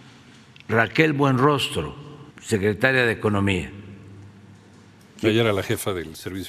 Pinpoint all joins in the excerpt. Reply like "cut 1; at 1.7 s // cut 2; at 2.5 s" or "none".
cut 1; at 2.3 s